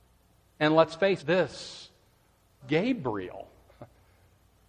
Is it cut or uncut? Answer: cut